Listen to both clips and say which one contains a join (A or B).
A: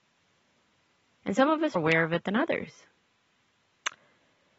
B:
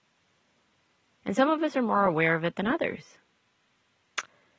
A